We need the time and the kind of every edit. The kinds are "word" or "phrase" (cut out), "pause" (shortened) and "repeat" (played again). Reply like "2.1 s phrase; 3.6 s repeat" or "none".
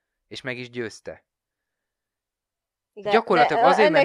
3.1 s word